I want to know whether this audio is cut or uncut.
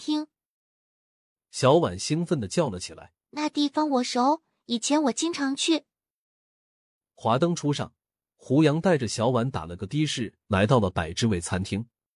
cut